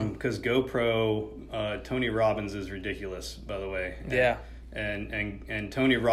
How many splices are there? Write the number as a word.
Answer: zero